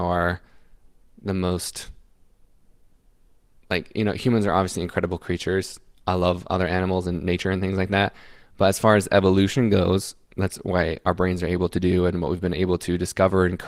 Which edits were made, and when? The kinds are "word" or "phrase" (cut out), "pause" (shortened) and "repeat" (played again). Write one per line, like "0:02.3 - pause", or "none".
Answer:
none